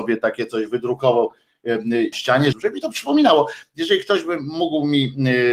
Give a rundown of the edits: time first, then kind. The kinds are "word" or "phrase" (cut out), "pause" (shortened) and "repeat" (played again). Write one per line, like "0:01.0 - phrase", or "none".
0:02.1 - phrase
0:02.5 - phrase